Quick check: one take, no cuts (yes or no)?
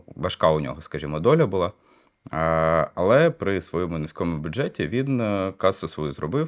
yes